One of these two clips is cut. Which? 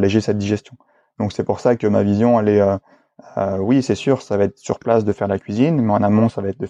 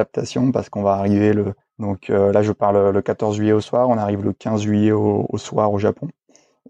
second; 1 cut; at 1.6 s

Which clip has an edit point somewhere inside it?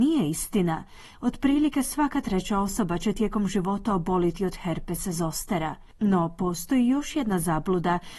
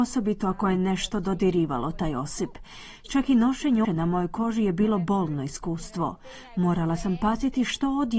second; 1 cut; at 3.8 s

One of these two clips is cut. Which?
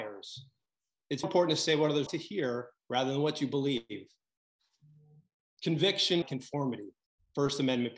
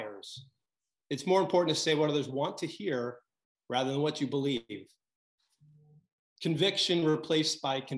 first; 4 cuts; at 1.2 s, 2.1 s, 2.8 s, 6.2 s

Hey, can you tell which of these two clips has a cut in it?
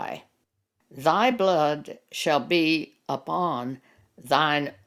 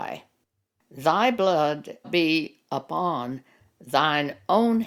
second; 1 cut; at 2.0 s

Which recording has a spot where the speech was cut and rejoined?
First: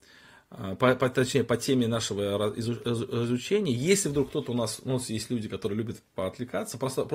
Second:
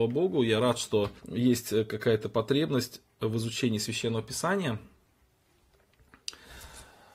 second; 1 cut; at 1.2 s

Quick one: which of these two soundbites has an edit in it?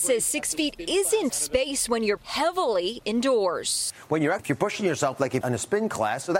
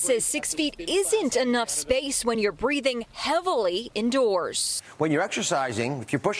first; 4 cuts; at 1.3 s, 2.2 s, 4.4 s, 5.4 s

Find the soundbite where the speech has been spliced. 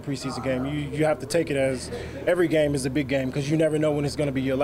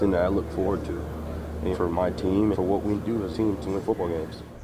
second; 5 cuts; at 1.7 s, 2.5 s, 2.9 s, 3.3 s, 3.6 s

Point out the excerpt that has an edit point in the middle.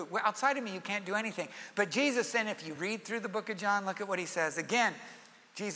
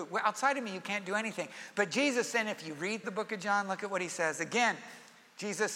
second; 1 cut; at 3.0 s

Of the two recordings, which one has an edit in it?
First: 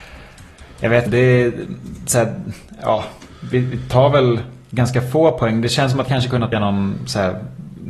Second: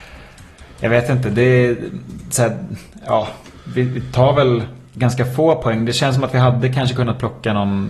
first; 3 cuts; at 1.1 s, 6.1 s, 6.5 s

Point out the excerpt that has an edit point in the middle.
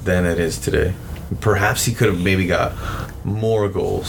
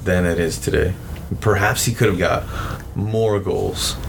second; 1 cut; at 2.2 s

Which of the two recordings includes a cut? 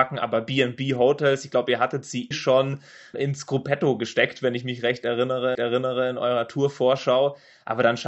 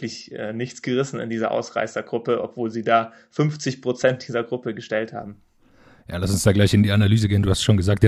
first; 3 cuts; at 2.3 s, 3.1 s, 5.5 s

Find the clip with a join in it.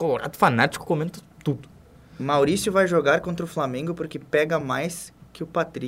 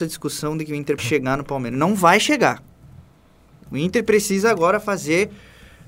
second; 1 cut; at 1.0 s

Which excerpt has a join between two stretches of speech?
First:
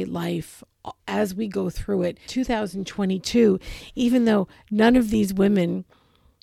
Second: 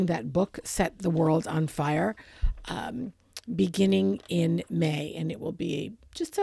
first; 2 cuts; at 1.0 s, 2.2 s

